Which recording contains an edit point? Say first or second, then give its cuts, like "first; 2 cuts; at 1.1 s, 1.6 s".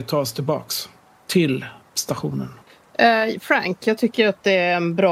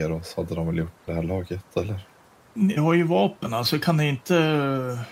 second; 2 cuts; at 1.1 s, 2.8 s